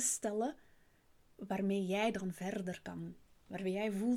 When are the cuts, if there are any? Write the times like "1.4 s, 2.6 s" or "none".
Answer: none